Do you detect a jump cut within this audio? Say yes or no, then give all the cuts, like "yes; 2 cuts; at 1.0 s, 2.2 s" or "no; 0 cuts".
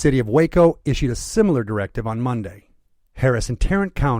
no; 0 cuts